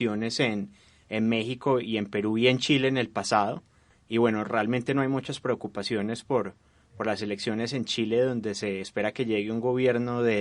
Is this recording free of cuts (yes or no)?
yes